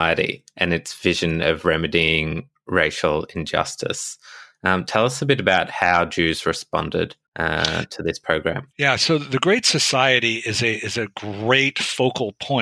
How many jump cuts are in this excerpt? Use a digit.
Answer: 2